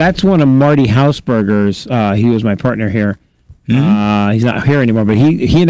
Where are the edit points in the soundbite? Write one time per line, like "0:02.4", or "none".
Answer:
none